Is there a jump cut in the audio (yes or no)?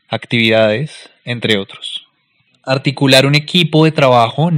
no